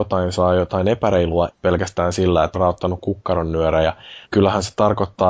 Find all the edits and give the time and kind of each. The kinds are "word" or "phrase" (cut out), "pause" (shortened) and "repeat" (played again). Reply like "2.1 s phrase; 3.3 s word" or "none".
1.5 s word; 2.5 s phrase; 4.2 s word